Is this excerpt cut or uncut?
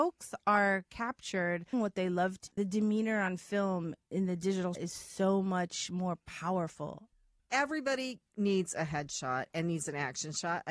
cut